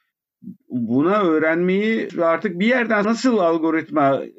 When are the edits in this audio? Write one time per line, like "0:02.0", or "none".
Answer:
0:02.1
0:03.0